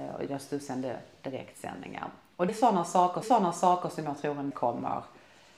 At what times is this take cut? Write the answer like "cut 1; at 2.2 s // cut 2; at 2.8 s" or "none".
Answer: cut 1; at 2.5 s // cut 2; at 3.2 s // cut 3; at 4.5 s